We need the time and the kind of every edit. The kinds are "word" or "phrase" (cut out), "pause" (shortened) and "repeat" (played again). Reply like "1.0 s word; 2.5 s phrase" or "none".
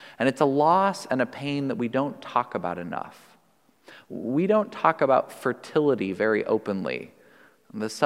none